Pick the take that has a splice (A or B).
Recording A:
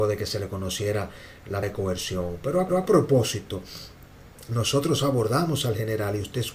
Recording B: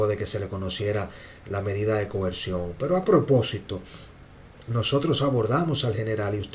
A